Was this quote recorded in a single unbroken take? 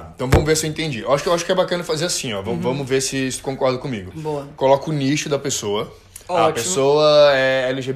yes; 0 cuts

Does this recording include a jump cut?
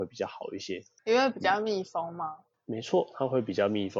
no; 0 cuts

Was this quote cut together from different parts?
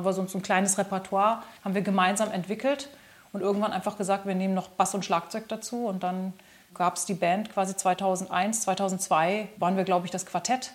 yes; 1 cut; at 1.6 s

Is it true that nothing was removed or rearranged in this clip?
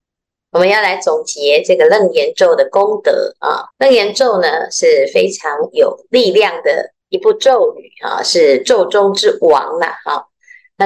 no; 2 cuts; at 3.7 s, 7.0 s

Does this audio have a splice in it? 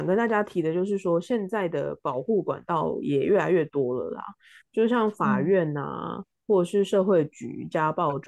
no; 0 cuts

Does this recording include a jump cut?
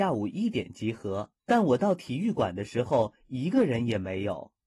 yes; 1 cut; at 1.4 s

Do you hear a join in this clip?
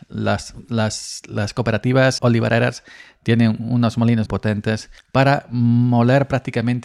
yes; 3 cuts; at 2.2 s, 4.3 s, 5.0 s

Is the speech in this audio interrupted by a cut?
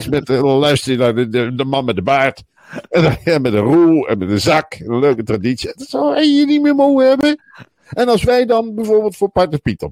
no; 0 cuts

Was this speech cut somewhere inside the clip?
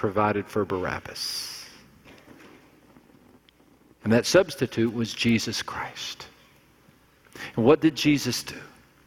no; 0 cuts

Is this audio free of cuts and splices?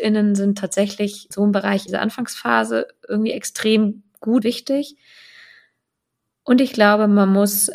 no; 3 cuts; at 1.3 s, 1.9 s, 4.4 s

